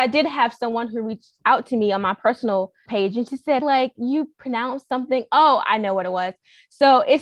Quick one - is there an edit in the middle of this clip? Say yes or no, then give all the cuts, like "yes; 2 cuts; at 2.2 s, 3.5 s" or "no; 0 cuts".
yes; 2 cuts; at 2.9 s, 3.6 s